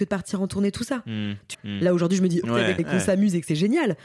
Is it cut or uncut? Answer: cut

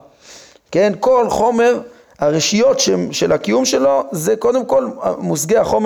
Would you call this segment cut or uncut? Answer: uncut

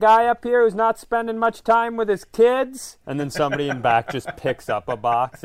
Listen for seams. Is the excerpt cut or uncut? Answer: cut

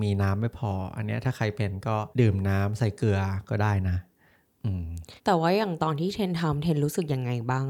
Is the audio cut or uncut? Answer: cut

